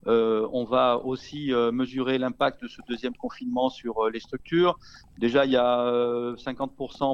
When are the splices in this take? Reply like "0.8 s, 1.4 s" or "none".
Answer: none